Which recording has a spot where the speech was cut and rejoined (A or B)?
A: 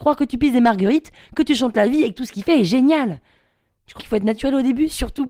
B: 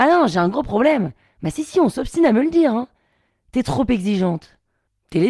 A